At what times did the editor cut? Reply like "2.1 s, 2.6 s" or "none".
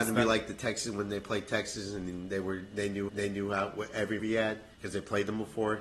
3.1 s, 4.2 s, 4.7 s